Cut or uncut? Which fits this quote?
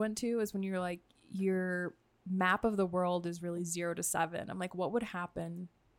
uncut